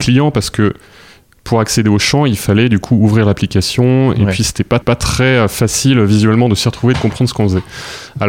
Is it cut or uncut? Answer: cut